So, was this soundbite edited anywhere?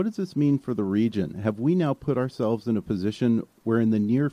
no; 0 cuts

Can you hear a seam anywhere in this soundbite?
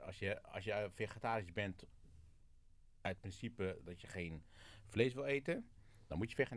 no; 0 cuts

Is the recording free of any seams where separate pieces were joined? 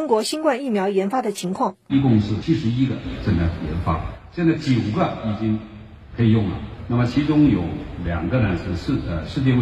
no; 1 cut; at 1.9 s

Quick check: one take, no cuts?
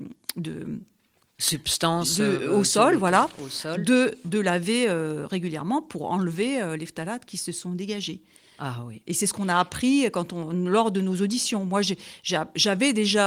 yes; 0 cuts

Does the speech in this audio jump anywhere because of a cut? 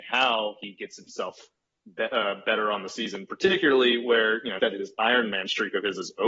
yes; 1 cut; at 4.6 s

